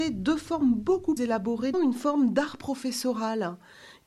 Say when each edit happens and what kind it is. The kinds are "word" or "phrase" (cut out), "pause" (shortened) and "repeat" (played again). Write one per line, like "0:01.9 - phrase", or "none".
0:01.2 - word
0:01.7 - phrase